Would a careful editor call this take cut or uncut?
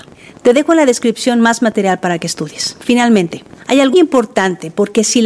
cut